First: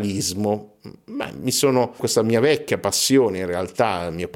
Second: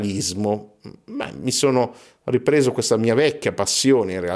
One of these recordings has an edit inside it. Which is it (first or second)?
first